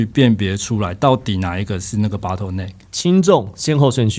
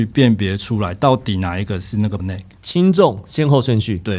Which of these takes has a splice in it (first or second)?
second